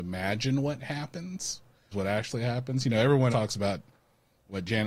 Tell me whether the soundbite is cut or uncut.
cut